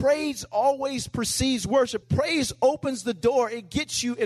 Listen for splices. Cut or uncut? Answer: cut